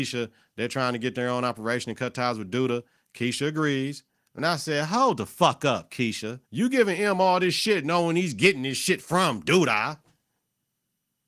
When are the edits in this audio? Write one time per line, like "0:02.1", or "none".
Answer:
0:06.4